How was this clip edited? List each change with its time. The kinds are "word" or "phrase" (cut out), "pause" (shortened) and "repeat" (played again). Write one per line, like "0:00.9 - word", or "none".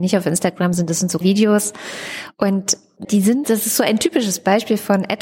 0:01.2 - word
0:03.0 - word
0:03.4 - word